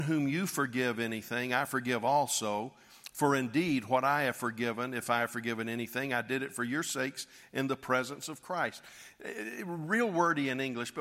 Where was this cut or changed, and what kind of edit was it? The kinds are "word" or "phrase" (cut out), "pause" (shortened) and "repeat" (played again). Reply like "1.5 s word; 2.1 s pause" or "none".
none